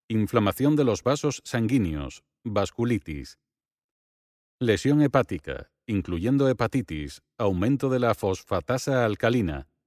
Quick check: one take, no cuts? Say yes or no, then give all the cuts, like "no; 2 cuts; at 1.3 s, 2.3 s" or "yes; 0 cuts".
yes; 0 cuts